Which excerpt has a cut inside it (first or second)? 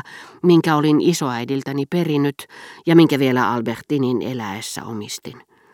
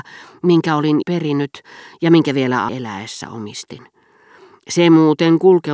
second